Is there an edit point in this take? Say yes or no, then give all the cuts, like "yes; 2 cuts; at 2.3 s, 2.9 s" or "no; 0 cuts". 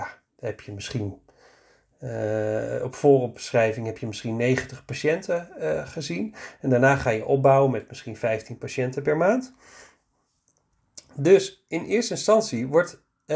no; 0 cuts